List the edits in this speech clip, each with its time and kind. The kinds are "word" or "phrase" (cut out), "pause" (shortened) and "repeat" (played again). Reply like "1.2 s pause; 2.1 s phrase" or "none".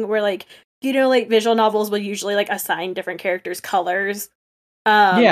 none